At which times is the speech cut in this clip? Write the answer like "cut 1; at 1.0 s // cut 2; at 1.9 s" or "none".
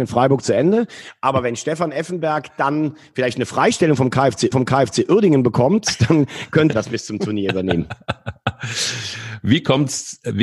cut 1; at 4.5 s // cut 2; at 6.7 s